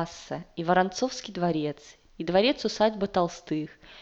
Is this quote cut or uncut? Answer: uncut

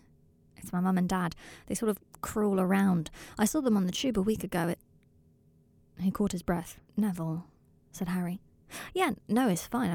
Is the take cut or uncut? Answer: cut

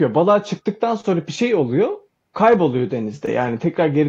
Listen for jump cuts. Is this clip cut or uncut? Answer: uncut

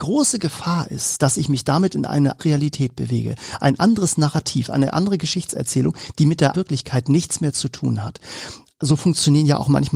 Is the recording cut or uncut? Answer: cut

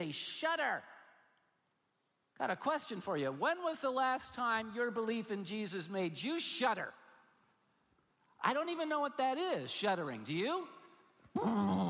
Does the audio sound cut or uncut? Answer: uncut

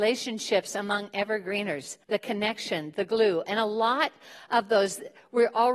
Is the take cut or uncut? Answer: cut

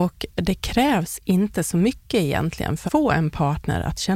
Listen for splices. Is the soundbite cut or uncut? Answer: cut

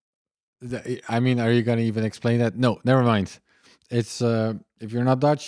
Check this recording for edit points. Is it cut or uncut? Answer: uncut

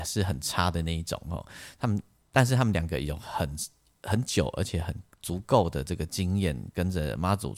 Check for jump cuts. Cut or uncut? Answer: uncut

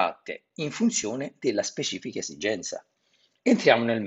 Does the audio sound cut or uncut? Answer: uncut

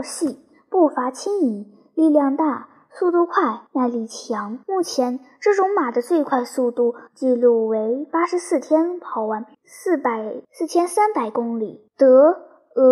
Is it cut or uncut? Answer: cut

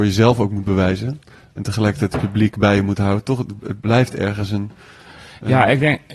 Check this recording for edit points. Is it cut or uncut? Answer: uncut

